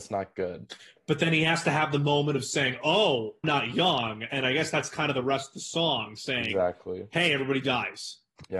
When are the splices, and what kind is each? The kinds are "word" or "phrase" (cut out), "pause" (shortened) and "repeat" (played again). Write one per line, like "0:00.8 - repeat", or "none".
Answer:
0:03.4 - word